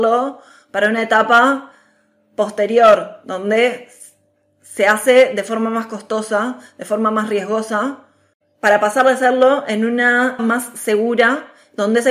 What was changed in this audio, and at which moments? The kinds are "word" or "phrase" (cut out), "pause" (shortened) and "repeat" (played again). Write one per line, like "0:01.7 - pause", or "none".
0:10.4 - word